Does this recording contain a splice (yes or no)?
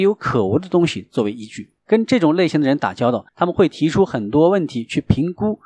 yes